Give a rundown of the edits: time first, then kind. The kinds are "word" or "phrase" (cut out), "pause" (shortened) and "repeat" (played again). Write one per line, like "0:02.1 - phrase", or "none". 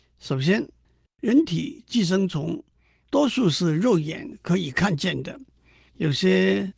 none